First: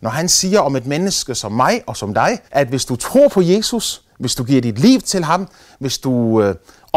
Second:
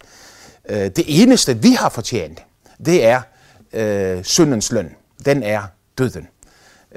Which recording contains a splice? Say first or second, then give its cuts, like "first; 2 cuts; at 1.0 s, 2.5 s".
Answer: first; 1 cut; at 2.5 s